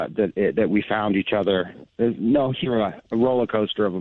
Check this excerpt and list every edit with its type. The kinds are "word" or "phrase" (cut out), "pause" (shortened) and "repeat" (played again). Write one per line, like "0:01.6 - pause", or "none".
0:02.6 - word
0:03.0 - word